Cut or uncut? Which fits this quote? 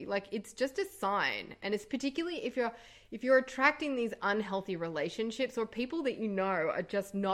uncut